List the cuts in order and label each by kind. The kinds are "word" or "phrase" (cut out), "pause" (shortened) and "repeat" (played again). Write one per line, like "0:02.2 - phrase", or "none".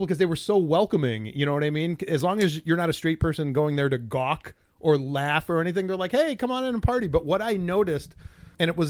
none